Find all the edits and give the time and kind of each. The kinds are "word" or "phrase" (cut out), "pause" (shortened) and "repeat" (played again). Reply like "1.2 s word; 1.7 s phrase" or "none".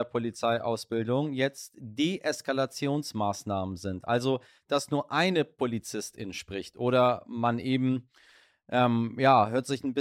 none